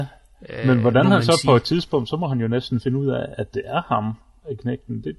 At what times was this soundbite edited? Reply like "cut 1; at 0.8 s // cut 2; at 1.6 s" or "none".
none